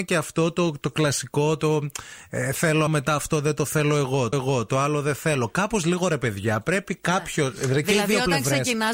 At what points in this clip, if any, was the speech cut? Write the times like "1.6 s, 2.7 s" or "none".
2.9 s, 4.3 s